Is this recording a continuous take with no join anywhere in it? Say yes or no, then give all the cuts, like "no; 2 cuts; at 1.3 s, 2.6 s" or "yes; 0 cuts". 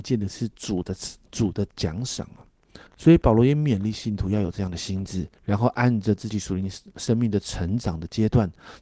no; 2 cuts; at 2.9 s, 5.4 s